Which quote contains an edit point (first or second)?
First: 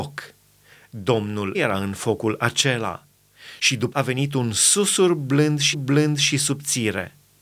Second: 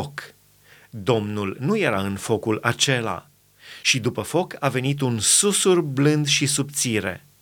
first